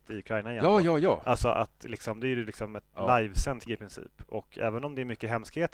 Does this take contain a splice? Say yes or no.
yes